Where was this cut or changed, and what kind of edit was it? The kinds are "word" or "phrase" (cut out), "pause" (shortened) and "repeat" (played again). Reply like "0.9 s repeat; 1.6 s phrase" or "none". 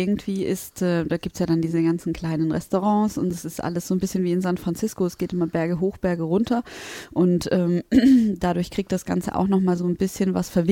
none